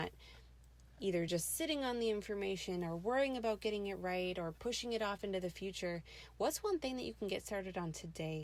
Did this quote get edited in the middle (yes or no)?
no